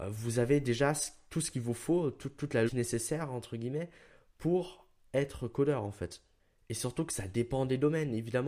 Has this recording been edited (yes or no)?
yes